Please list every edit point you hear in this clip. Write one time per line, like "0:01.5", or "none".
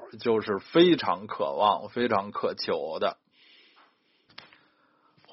none